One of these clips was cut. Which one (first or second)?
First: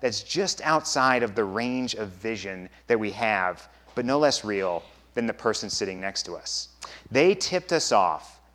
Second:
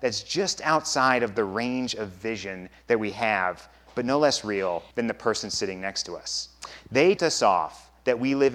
second